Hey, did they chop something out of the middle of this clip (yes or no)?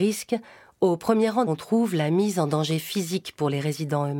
yes